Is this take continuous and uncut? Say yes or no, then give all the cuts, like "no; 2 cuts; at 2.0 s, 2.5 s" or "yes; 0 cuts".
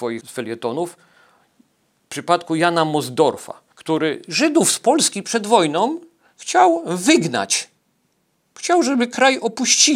yes; 0 cuts